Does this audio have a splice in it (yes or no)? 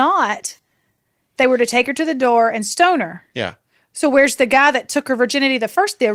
no